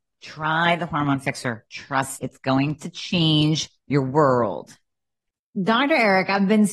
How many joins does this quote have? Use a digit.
1